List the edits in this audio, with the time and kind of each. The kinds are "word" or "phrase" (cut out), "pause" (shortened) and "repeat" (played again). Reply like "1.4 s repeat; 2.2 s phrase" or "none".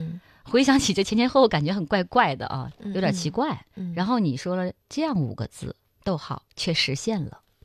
3.7 s pause; 4.8 s pause; 5.8 s word